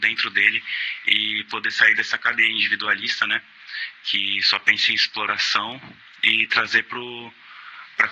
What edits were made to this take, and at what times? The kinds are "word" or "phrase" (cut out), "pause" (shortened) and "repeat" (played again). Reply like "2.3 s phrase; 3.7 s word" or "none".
none